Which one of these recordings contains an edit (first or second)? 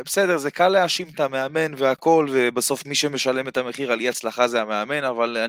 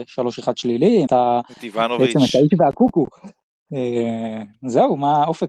second